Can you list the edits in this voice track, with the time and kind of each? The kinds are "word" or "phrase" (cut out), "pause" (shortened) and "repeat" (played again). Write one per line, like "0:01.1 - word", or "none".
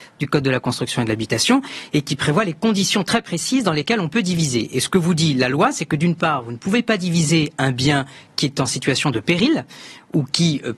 none